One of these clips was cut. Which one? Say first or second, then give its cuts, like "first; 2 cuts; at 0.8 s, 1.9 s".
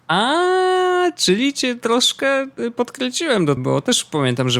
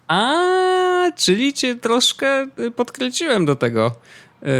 first; 1 cut; at 3.6 s